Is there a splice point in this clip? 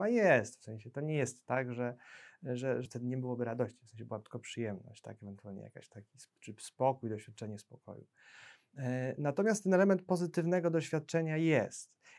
yes; 1 cut; at 2.8 s

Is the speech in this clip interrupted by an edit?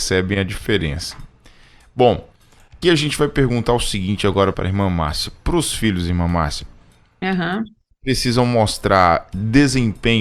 yes; 2 cuts; at 2.8 s, 4.5 s

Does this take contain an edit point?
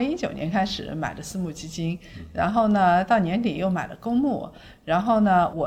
no; 0 cuts

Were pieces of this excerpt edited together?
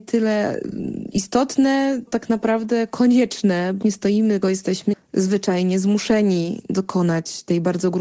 yes; 4 cuts; at 2.1 s, 3.8 s, 4.4 s, 4.9 s

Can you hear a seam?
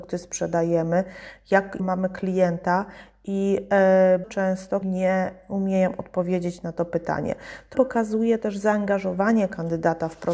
yes; 4 cuts; at 1.8 s, 4.2 s, 4.8 s, 7.7 s

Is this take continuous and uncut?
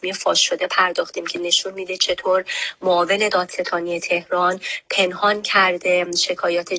yes; 0 cuts

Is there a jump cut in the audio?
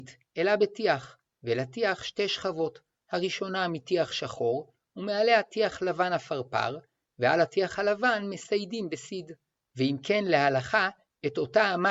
no; 0 cuts

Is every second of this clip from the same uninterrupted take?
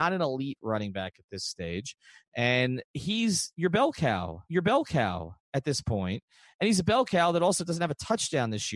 no; 1 cut; at 4.5 s

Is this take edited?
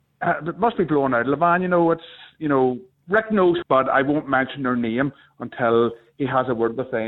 yes; 1 cut; at 3.6 s

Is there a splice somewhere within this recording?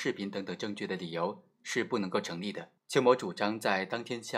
yes; 1 cut; at 2.8 s

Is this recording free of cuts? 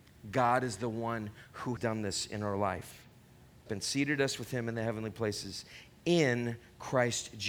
no; 2 cuts; at 1.8 s, 3.7 s

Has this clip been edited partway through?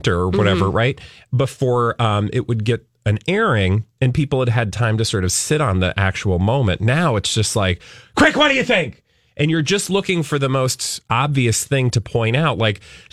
no; 0 cuts

